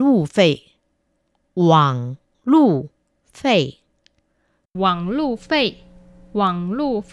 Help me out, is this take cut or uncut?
uncut